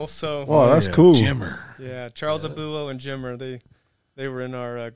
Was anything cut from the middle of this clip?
no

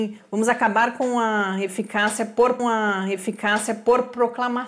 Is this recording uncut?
no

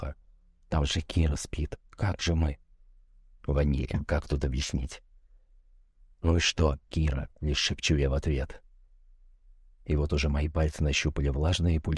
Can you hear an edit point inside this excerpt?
no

